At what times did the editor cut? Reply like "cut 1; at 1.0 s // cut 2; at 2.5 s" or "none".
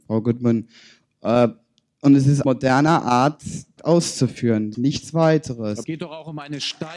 cut 1; at 2.4 s // cut 2; at 3.8 s // cut 3; at 4.7 s // cut 4; at 5.8 s